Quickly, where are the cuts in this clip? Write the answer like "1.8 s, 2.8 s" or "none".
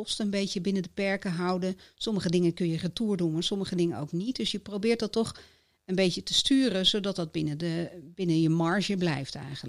none

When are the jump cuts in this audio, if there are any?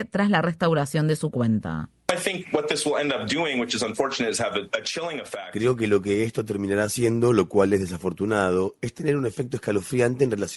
none

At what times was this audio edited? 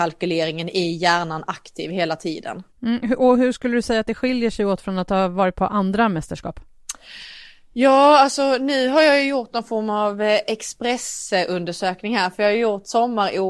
2.7 s

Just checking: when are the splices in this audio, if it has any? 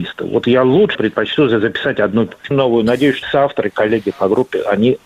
0.9 s, 2.5 s, 3.2 s

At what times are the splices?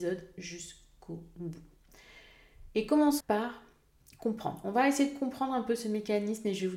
3.2 s

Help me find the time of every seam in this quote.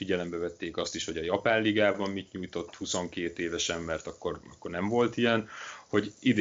none

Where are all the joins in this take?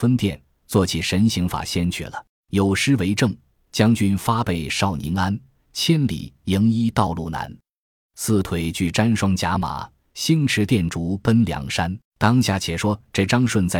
2.3 s, 12.0 s

